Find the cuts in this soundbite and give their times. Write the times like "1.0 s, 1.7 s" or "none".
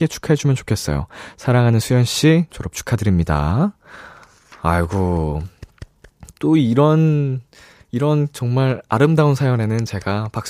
none